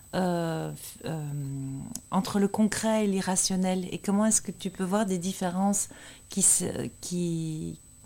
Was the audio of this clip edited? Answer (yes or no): no